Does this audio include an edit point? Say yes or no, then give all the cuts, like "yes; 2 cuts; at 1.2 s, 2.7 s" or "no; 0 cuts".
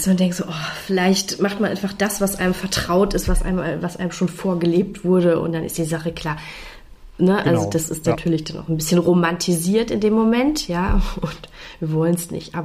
no; 0 cuts